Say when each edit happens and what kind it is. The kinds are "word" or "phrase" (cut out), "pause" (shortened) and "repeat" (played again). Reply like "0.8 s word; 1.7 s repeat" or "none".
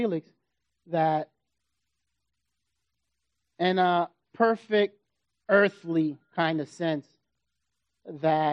none